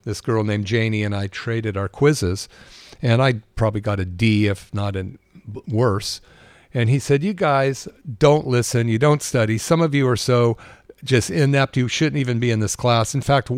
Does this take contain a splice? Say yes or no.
no